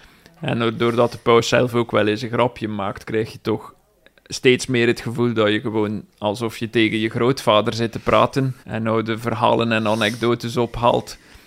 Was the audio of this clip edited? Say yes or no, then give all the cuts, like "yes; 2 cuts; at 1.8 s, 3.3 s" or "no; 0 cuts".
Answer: yes; 1 cut; at 8.6 s